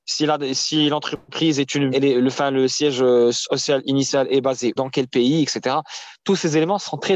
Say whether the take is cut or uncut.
cut